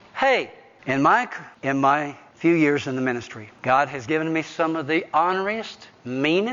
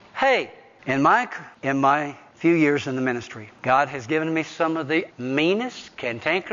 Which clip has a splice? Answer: second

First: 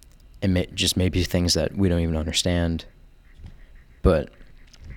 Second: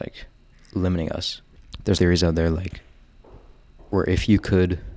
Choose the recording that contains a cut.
second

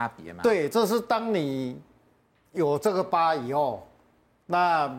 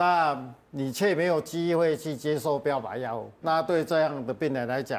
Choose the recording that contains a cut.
second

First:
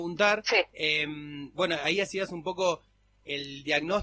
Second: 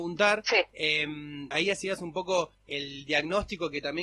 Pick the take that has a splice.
second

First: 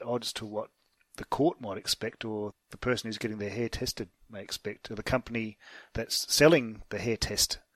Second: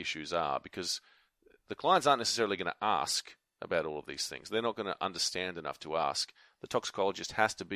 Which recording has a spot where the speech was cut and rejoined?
first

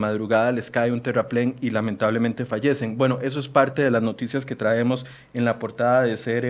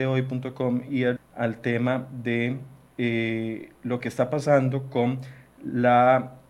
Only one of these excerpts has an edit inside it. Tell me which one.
second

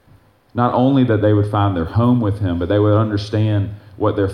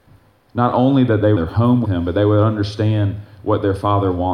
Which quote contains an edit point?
second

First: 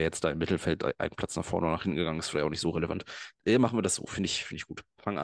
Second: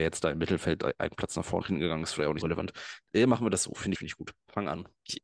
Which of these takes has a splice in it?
second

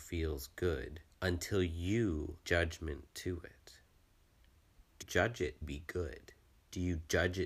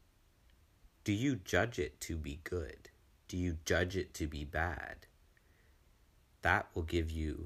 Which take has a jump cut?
first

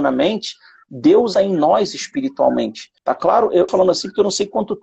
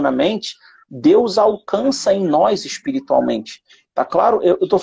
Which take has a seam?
first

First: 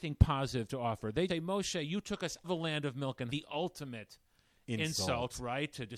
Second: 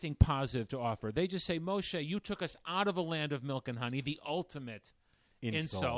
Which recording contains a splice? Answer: first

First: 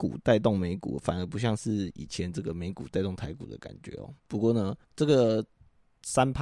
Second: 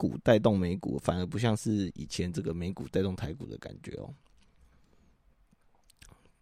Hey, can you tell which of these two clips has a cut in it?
first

